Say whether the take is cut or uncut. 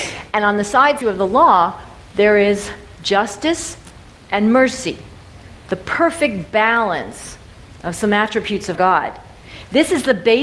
cut